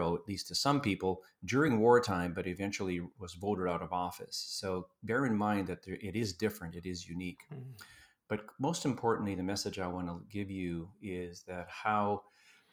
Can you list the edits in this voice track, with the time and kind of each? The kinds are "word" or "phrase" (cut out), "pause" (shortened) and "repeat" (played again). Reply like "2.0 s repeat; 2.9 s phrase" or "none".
none